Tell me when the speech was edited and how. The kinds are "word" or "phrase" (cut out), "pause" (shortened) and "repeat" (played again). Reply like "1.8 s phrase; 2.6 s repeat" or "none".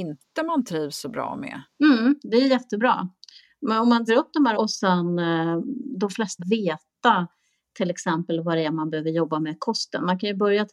4.1 s word; 4.5 s word; 6.4 s word